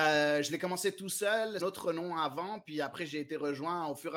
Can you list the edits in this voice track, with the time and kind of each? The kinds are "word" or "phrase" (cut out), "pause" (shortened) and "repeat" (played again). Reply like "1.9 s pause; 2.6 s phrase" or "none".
1.6 s phrase